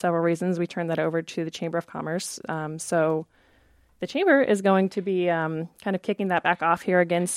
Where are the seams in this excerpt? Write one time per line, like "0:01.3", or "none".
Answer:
none